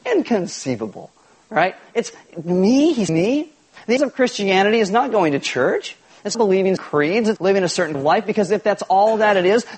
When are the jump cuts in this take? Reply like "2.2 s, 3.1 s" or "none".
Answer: 3.1 s, 4.0 s, 6.3 s, 6.8 s, 7.4 s, 7.9 s